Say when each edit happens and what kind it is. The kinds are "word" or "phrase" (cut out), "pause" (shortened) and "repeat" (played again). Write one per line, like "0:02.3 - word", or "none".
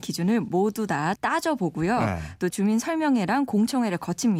0:01.2 - word
0:02.5 - word